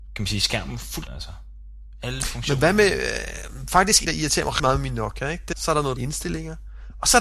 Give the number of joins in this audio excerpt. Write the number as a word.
five